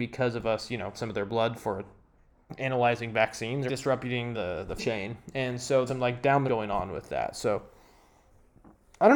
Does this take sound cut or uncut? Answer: cut